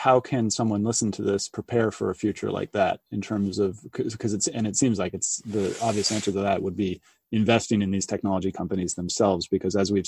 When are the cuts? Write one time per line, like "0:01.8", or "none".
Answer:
none